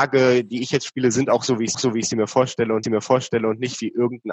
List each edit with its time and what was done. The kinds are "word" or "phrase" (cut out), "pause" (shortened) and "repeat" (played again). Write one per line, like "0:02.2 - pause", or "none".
0:01.7 - repeat
0:02.8 - repeat